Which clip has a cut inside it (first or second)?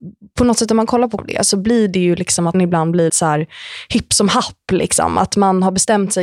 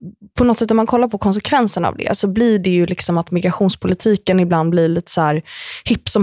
first